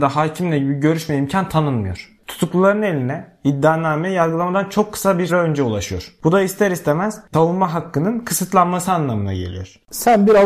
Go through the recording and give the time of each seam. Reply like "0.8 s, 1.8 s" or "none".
5.3 s